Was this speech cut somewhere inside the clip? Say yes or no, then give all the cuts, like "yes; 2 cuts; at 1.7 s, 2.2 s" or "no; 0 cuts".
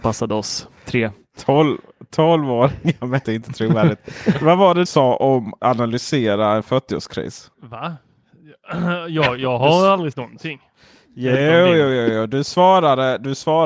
yes; 5 cuts; at 3.2 s, 4.9 s, 5.6 s, 7.5 s, 10.1 s